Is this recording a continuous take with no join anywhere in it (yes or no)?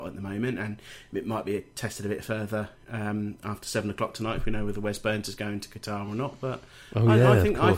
yes